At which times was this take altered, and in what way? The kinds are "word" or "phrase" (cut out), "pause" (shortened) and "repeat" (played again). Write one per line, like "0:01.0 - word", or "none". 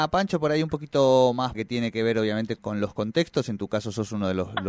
0:01.5 - word
0:02.6 - word